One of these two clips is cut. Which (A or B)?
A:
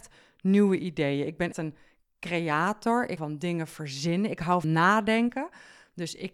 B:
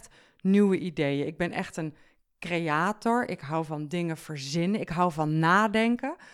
A